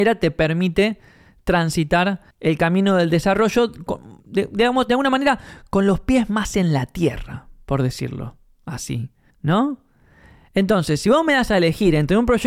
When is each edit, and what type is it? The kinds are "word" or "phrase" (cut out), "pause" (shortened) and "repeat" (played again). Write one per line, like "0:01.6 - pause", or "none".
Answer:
0:02.3 - pause
0:04.2 - pause
0:09.3 - pause